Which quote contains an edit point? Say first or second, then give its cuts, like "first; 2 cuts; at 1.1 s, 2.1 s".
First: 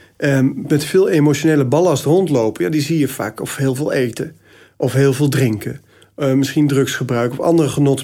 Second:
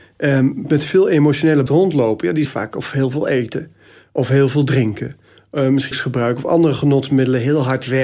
second; 3 cuts; at 1.7 s, 2.5 s, 5.9 s